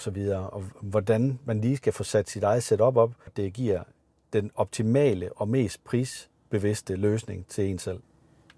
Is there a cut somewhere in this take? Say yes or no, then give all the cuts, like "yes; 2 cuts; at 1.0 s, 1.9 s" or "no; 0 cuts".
yes; 1 cut; at 3.3 s